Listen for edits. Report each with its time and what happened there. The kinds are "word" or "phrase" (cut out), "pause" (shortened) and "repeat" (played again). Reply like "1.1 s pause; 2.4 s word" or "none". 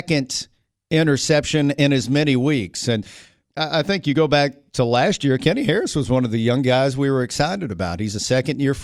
none